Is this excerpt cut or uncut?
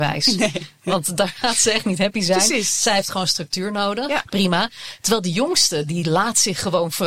uncut